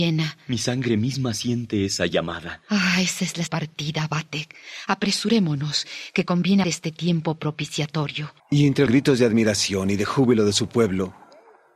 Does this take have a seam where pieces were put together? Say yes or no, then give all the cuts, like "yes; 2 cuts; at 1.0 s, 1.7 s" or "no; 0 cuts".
yes; 4 cuts; at 3.5 s, 6.6 s, 8.4 s, 8.9 s